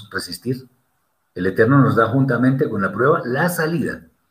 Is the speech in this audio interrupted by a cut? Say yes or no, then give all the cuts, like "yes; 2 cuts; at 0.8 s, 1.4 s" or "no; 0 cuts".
no; 0 cuts